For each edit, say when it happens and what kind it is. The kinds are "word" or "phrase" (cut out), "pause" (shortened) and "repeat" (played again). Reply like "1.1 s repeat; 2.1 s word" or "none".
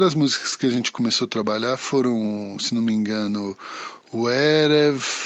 none